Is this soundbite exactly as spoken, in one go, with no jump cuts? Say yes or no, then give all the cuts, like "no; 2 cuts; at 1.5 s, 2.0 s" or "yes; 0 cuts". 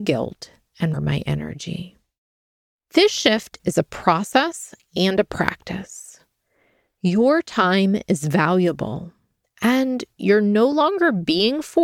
no; 1 cut; at 0.9 s